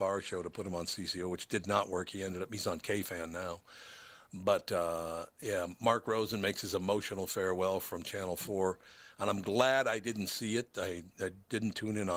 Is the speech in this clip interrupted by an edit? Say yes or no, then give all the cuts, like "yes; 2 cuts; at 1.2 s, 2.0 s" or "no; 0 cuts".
no; 0 cuts